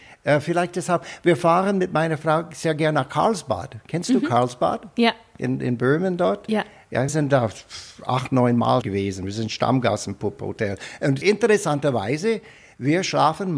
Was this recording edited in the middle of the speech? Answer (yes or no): yes